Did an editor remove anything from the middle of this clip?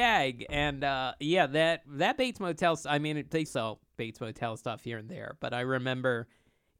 yes; 1 cut; at 3.5 s

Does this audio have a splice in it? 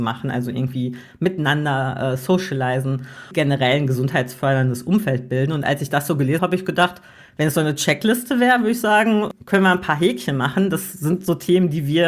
yes; 2 cuts; at 3.3 s, 6.4 s

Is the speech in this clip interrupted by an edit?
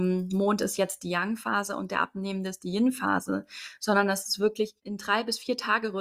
yes; 1 cut; at 4.8 s

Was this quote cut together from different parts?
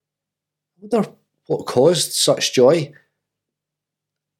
no; 0 cuts

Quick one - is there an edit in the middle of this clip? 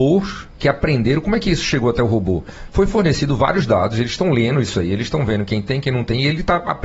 no; 0 cuts

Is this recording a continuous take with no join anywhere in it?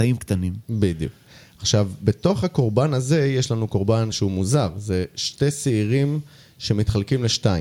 yes; 0 cuts

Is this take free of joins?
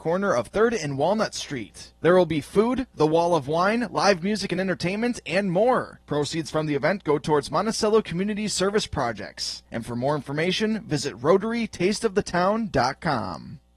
yes; 0 cuts

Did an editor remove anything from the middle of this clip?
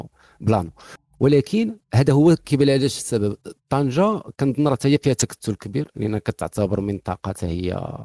no; 0 cuts

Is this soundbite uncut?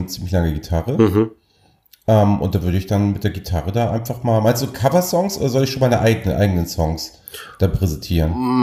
yes; 0 cuts

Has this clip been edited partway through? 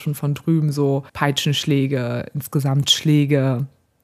yes; 1 cut; at 1.1 s

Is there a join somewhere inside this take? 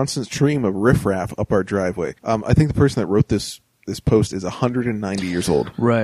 yes; 1 cut; at 2.2 s

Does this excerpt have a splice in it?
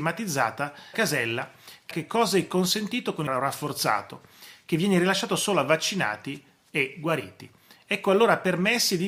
yes; 3 cuts; at 0.9 s, 1.9 s, 3.3 s

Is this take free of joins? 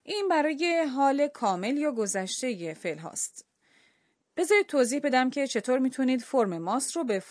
yes; 0 cuts

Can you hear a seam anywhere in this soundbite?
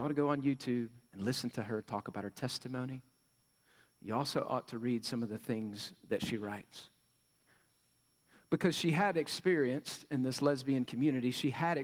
no; 0 cuts

